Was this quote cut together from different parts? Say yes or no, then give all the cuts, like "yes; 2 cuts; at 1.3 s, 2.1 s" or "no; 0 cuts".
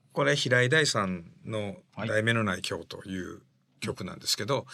no; 0 cuts